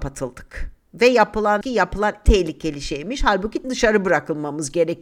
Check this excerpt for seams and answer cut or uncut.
cut